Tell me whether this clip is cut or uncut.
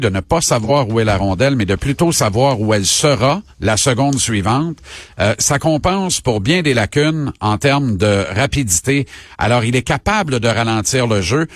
cut